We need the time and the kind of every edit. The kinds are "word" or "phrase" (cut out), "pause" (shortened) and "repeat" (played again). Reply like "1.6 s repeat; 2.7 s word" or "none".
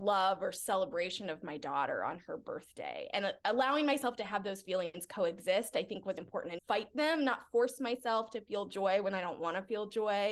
6.2 s word; 6.6 s word